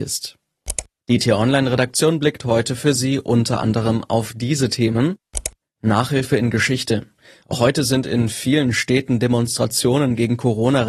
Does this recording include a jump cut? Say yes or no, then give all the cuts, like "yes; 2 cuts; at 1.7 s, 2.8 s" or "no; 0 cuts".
no; 0 cuts